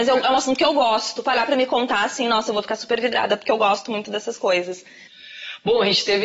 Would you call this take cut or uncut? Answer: uncut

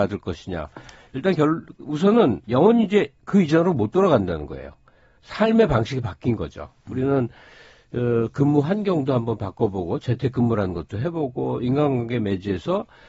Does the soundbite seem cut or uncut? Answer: uncut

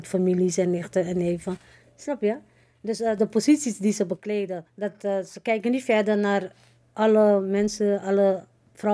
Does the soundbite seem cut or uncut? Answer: cut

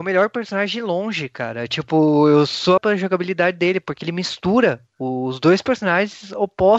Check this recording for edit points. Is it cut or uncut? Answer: cut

